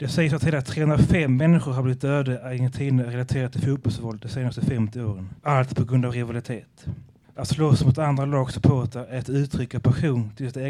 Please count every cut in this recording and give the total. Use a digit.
2